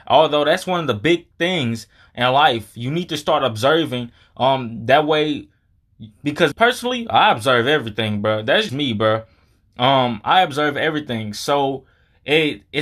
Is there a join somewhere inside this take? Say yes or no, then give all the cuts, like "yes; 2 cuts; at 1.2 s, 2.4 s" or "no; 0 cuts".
yes; 2 cuts; at 6.5 s, 8.7 s